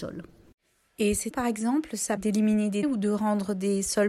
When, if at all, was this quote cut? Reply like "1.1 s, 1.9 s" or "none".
1.3 s, 2.2 s, 2.8 s